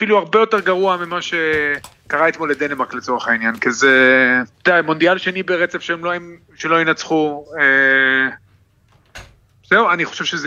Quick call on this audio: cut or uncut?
cut